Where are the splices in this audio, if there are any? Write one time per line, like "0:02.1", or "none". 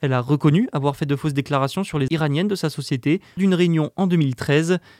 0:02.1
0:03.4